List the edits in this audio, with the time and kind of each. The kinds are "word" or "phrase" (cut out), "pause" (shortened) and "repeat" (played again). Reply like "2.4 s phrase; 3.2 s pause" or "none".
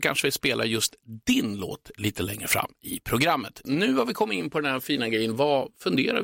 none